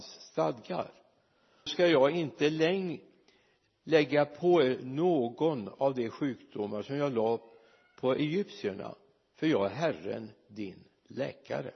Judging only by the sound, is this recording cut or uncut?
cut